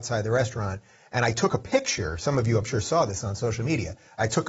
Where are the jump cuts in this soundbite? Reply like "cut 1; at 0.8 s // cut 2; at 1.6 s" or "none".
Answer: none